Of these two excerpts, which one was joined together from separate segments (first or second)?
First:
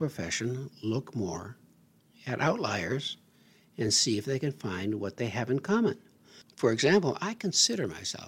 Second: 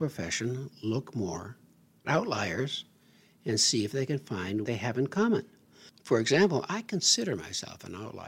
second